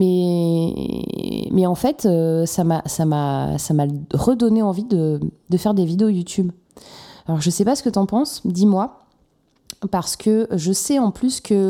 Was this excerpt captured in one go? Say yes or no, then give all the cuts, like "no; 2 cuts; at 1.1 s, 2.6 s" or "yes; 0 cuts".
yes; 0 cuts